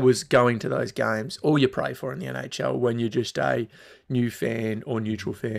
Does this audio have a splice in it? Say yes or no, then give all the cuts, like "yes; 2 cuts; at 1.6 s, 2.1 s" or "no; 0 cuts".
no; 0 cuts